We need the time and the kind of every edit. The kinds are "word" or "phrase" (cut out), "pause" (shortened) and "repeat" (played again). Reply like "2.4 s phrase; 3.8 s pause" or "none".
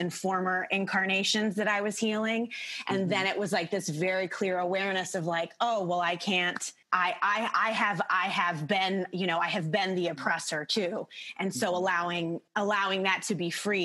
6.8 s pause; 12.5 s pause